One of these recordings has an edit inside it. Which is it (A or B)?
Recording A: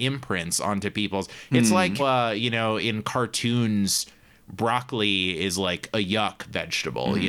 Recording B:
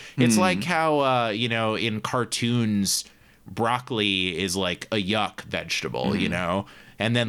A